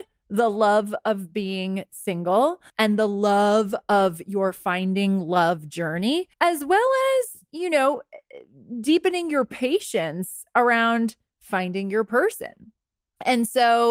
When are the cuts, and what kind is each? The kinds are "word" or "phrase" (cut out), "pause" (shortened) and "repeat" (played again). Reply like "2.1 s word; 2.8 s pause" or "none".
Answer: 2.7 s pause; 6.3 s pause